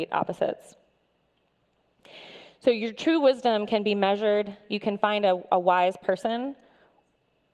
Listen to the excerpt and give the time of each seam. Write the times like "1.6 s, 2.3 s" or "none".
none